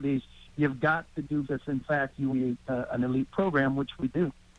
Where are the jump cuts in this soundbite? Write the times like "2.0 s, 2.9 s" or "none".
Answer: 1.4 s, 2.3 s